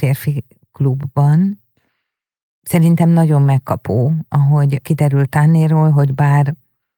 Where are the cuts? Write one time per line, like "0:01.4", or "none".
none